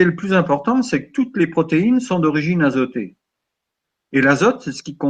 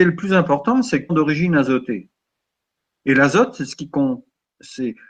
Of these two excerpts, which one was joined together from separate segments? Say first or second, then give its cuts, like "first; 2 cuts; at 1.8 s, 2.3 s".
second; 1 cut; at 1.1 s